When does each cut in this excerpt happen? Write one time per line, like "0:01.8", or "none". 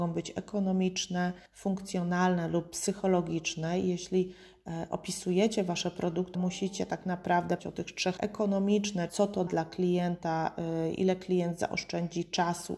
0:01.5
0:06.3
0:07.6
0:08.2
0:09.1
0:09.5